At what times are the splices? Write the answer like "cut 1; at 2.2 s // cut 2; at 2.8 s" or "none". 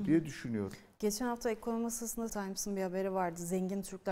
cut 1; at 2.3 s